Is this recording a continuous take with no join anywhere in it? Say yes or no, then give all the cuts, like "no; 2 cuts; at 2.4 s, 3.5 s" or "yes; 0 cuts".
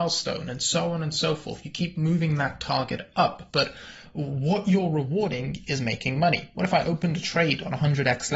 yes; 0 cuts